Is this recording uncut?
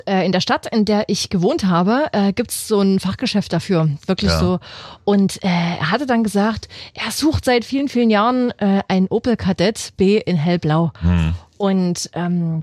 yes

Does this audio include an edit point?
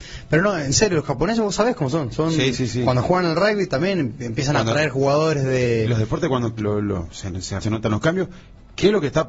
yes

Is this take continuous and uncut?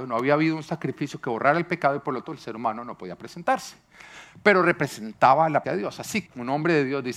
no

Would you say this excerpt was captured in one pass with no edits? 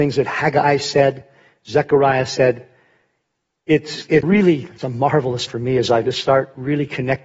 no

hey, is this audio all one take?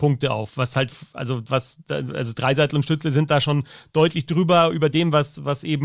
yes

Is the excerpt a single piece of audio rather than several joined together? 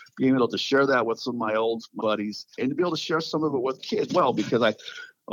no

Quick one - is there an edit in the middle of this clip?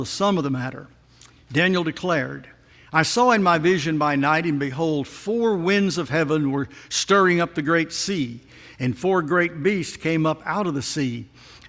no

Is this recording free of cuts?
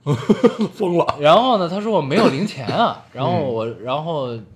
yes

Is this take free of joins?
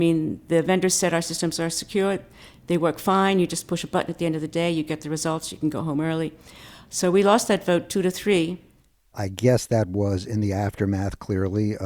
yes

